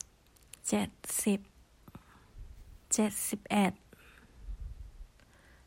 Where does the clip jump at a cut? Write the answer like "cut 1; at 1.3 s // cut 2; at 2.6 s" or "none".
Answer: cut 1; at 2.8 s